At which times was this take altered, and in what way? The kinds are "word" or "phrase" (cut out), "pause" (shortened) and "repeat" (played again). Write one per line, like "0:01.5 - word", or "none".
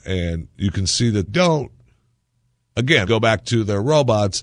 0:01.3 - word
0:03.1 - word